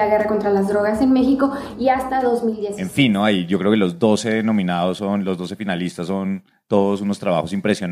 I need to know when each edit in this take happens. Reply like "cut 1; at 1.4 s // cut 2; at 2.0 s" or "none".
none